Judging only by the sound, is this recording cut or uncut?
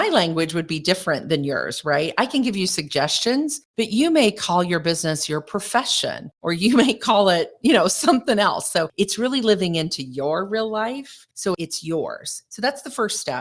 uncut